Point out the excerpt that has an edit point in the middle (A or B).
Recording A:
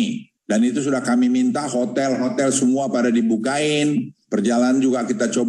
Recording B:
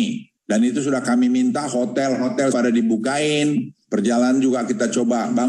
B